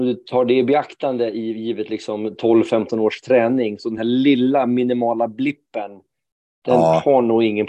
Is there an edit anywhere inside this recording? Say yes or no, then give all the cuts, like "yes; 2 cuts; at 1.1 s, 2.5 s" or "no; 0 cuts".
no; 0 cuts